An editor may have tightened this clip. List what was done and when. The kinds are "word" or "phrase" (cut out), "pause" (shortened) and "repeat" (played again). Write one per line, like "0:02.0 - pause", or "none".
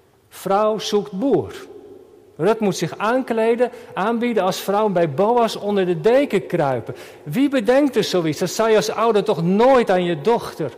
none